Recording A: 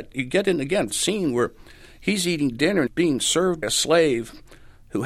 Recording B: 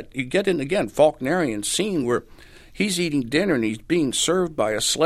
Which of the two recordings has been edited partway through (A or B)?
A